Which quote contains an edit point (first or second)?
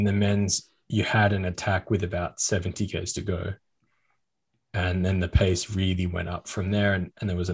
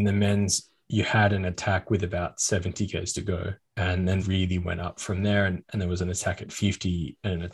second